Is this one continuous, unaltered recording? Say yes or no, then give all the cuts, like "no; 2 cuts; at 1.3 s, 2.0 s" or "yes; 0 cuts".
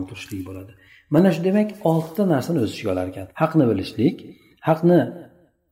no; 1 cut; at 3.3 s